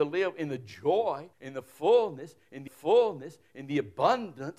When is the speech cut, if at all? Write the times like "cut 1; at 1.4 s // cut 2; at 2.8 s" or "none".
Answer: cut 1; at 1.3 s // cut 2; at 2.7 s